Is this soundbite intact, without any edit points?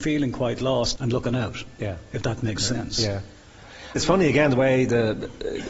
no; 2 cuts; at 1.0 s, 4.0 s

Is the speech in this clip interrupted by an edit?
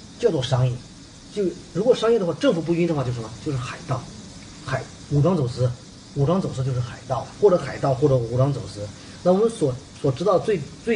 yes; 1 cut; at 7.4 s

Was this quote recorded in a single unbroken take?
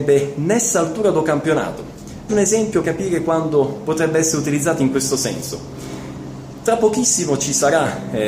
no; 2 cuts; at 2.3 s, 2.8 s

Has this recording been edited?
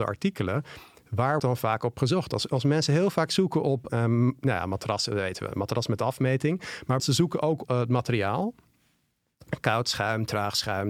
yes; 4 cuts; at 1.4 s, 3.9 s, 7.0 s, 7.6 s

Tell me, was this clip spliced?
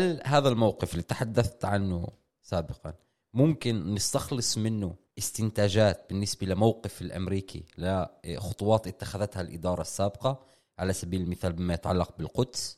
no; 0 cuts

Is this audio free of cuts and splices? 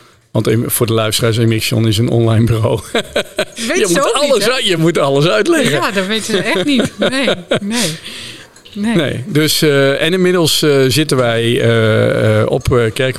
yes; 0 cuts

